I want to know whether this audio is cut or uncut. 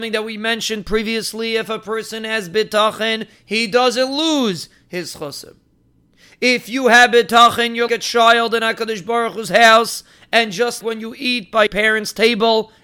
cut